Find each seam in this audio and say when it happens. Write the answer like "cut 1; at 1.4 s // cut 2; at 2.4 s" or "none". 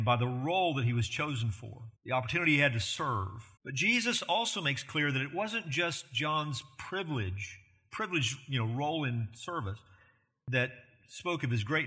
cut 1; at 1.9 s // cut 2; at 3.6 s